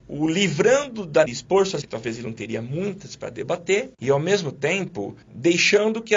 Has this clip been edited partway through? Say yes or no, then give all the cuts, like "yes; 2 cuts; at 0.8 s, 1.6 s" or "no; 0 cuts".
yes; 4 cuts; at 1.3 s, 1.8 s, 3.9 s, 5.2 s